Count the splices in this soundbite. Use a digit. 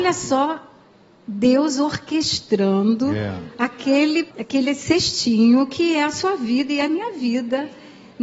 1